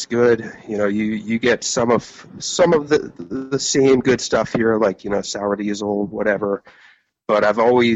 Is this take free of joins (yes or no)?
yes